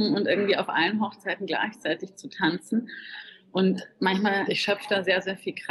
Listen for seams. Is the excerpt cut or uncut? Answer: cut